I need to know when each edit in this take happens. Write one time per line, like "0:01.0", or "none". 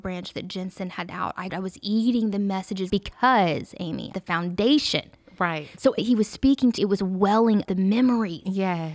0:01.1
0:01.5
0:02.9
0:04.1
0:06.0
0:06.8
0:07.6